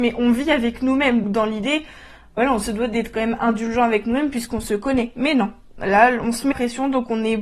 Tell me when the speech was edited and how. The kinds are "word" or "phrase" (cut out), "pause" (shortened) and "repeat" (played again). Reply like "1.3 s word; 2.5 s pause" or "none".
1.2 s word; 6.5 s word